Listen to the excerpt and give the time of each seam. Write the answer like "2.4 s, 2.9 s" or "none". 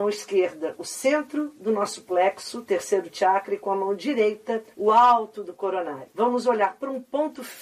4.7 s, 6.1 s